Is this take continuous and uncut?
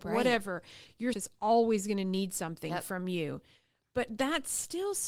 no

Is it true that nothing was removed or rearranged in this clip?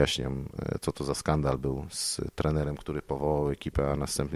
yes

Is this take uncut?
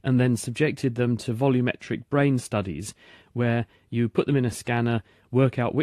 yes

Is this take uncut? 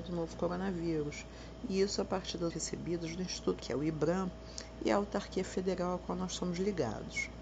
no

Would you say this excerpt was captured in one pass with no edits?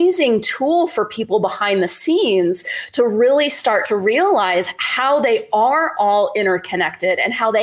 yes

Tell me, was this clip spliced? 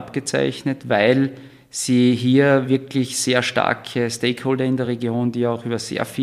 no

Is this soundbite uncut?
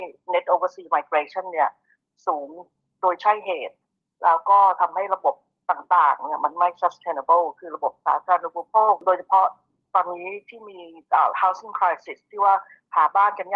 yes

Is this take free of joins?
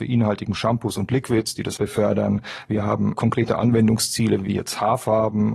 no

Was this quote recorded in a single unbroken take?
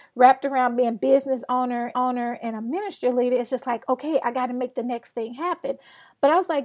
no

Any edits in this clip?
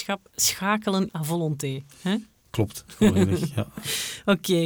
yes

